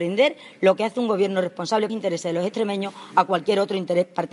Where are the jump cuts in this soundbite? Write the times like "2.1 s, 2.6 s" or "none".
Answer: 1.9 s